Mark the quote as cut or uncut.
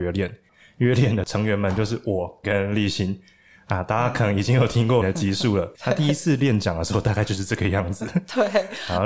cut